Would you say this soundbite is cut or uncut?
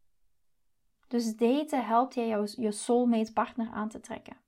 uncut